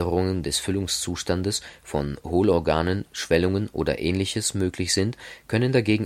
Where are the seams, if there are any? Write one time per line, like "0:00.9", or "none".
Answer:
none